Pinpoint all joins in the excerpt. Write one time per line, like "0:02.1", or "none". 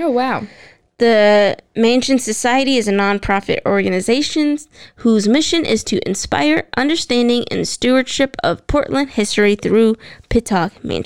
none